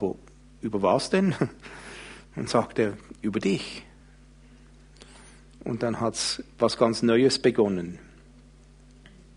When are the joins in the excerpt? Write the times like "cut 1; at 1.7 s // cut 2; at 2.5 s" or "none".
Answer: none